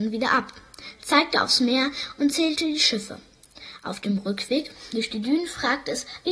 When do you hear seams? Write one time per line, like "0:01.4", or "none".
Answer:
none